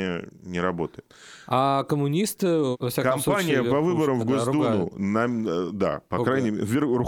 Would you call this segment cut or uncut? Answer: uncut